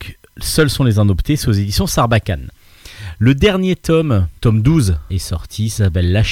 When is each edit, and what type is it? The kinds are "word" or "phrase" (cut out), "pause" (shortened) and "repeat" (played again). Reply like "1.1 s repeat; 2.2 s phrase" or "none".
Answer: 4.4 s word; 5.1 s phrase

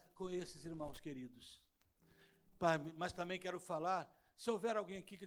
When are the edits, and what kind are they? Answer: none

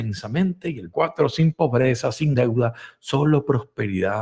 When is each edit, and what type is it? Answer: 0.9 s phrase; 2.3 s phrase

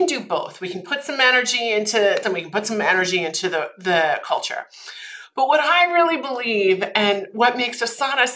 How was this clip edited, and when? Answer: 2.2 s phrase

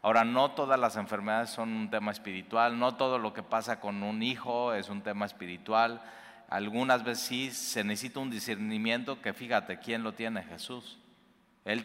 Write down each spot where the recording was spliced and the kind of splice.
none

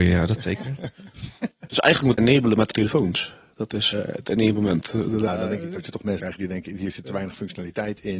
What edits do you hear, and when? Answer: 1.7 s word; 2.2 s word; 2.7 s word; 3.9 s word; 5.3 s word; 6.2 s word

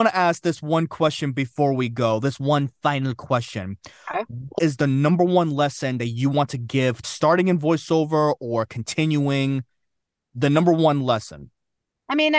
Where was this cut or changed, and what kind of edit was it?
4.6 s phrase; 7.0 s phrase

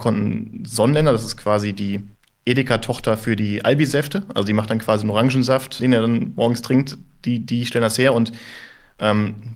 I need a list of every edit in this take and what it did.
2.1 s pause; 5.8 s word

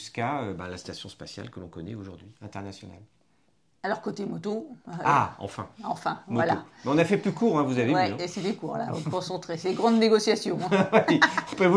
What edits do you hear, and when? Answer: 2.4 s pause

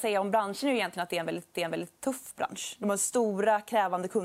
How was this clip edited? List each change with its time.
1.5 s repeat

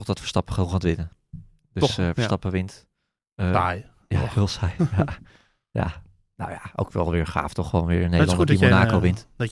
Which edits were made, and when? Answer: none

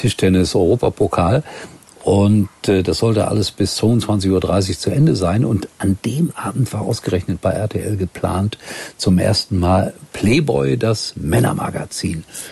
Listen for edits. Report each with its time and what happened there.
none

